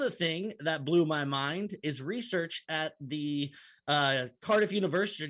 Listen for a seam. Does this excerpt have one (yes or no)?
no